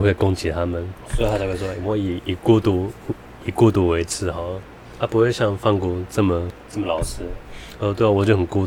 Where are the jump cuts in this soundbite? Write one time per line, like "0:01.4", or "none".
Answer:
0:01.0